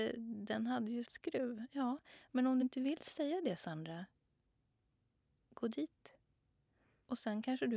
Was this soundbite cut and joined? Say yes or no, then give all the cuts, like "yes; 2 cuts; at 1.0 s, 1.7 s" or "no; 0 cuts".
yes; 2 cuts; at 1.0 s, 2.6 s